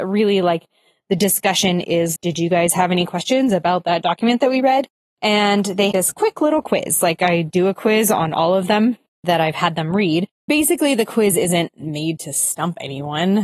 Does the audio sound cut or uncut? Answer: cut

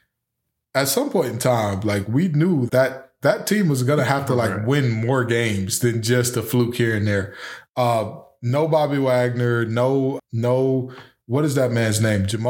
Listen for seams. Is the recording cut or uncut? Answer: cut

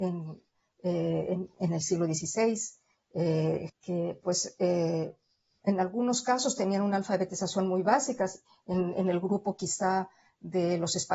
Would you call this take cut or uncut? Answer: cut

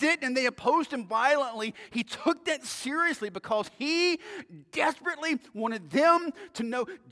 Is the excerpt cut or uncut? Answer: uncut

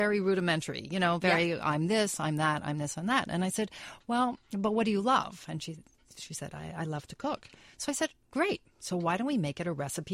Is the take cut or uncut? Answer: uncut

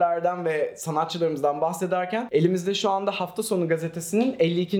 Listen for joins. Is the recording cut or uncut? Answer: uncut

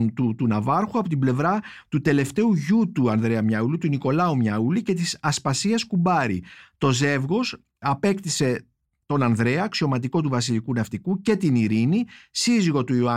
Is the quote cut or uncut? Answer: uncut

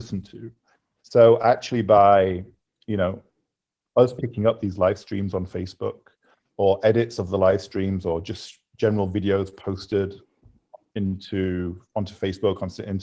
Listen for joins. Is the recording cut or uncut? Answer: uncut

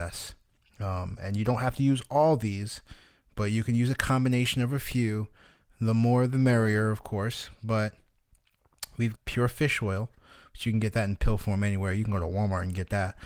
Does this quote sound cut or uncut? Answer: cut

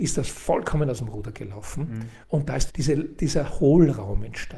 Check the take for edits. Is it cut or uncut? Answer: cut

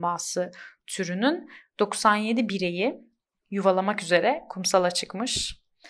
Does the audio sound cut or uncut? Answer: uncut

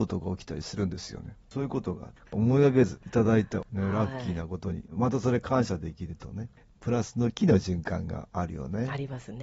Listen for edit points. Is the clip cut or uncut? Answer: uncut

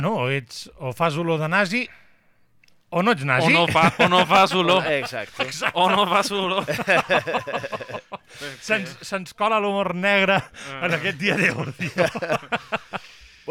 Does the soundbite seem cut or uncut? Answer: uncut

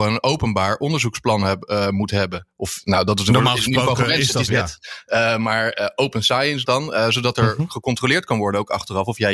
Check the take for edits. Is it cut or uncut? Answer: cut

